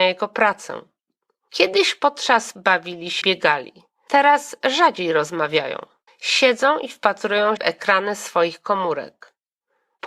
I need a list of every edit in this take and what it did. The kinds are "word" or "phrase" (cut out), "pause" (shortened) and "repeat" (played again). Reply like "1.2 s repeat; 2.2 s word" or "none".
2.5 s phrase; 3.2 s word; 6.1 s pause; 7.6 s word